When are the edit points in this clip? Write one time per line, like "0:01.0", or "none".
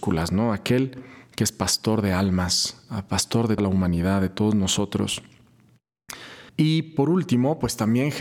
0:03.6
0:06.5

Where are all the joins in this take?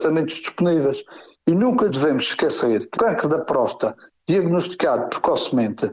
0:01.9
0:02.9

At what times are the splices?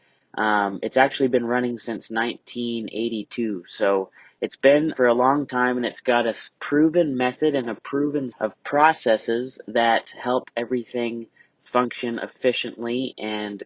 0:04.9
0:08.3

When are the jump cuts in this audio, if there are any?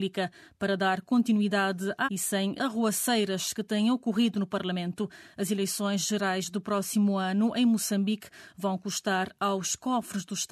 0:02.0
0:02.6

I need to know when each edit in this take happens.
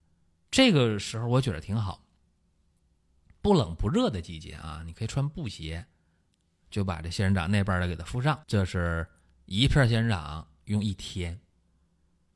0:08.4

